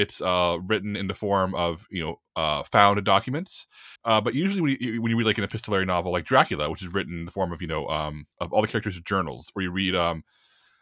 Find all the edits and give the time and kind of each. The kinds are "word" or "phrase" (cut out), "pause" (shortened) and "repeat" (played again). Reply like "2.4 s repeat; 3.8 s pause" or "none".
2.3 s pause; 4.0 s pause; 8.3 s pause